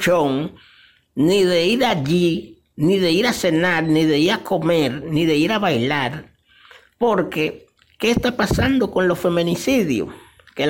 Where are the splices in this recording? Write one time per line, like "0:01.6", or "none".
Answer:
none

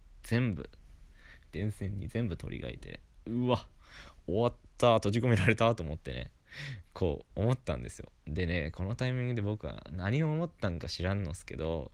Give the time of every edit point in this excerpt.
0:08.2

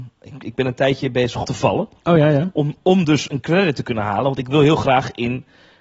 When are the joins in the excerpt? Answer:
0:01.4

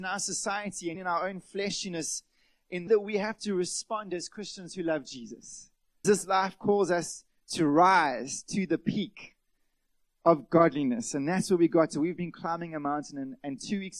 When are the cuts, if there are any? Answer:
0:00.9
0:02.9
0:06.0

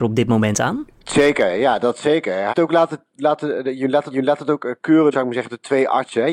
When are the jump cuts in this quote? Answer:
0:00.9
0:02.5
0:04.1
0:05.1

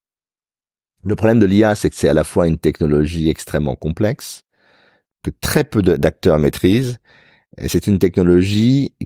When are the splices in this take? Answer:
none

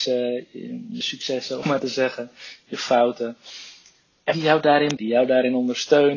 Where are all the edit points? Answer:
0:01.0
0:01.6
0:04.3
0:05.0

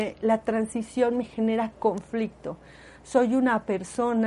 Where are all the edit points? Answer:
none

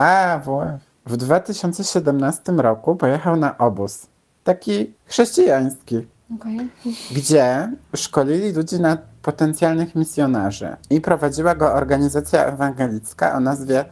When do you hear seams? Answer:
0:05.0
0:07.8
0:10.8

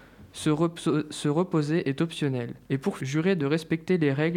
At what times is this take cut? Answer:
0:02.6
0:03.0

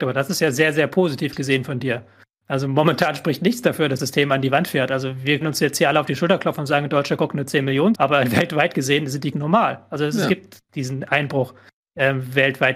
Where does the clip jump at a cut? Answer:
0:04.0
0:05.4
0:07.9
0:09.3

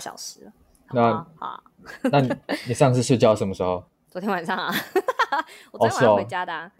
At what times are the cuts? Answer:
0:00.9

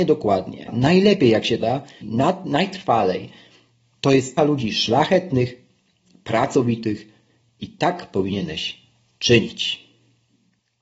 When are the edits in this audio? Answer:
0:01.6
0:02.0
0:04.4

